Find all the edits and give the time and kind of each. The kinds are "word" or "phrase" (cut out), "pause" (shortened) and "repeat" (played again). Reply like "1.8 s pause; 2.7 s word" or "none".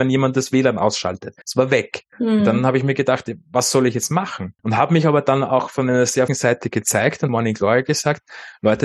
1.4 s pause; 2.1 s pause; 4.6 s pause; 6.3 s word; 7.3 s phrase